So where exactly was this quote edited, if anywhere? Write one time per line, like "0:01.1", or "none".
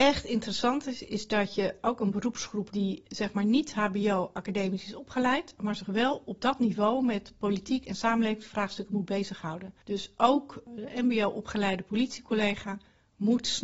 0:02.7